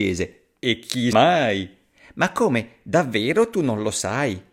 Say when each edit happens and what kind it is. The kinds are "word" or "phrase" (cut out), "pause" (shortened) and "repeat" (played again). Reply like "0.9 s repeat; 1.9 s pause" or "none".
1.1 s word